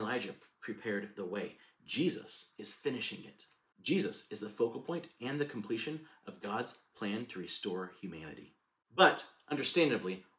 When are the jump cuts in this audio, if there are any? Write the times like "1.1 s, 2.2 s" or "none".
none

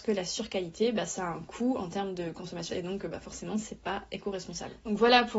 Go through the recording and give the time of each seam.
2.7 s

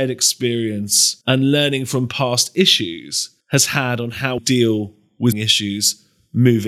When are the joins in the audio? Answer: 1.2 s, 3.4 s, 4.4 s, 5.3 s

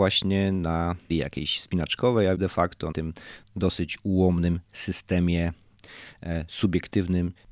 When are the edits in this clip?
1.1 s, 2.3 s, 2.9 s, 4.6 s

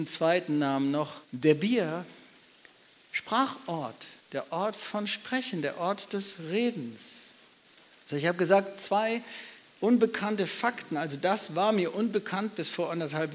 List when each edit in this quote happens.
1.2 s, 4.2 s, 7.7 s

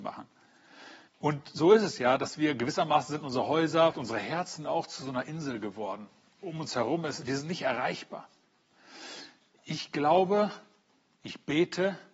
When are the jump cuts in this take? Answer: 1.1 s, 3.9 s

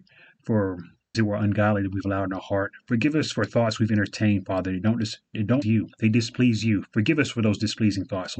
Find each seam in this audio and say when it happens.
1.1 s, 5.6 s

